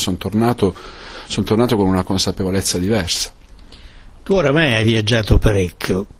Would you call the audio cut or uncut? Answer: uncut